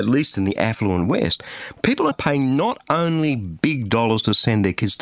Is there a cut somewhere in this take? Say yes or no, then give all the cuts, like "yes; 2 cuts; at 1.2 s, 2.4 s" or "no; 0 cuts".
yes; 1 cut; at 2.1 s